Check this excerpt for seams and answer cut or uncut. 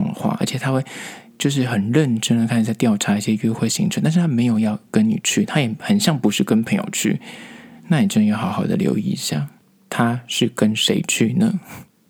uncut